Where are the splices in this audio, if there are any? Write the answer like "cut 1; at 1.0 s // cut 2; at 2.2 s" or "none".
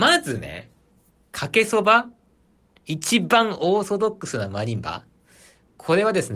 none